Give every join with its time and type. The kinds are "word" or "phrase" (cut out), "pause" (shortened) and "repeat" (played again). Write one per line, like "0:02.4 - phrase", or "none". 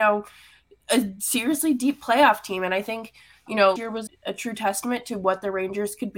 0:03.8 - word
0:04.1 - word